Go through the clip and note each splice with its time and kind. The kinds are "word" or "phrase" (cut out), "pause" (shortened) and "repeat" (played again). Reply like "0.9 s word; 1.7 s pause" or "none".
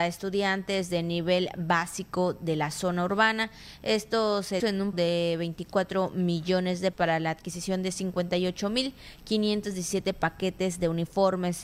4.6 s word; 4.9 s word; 6.9 s word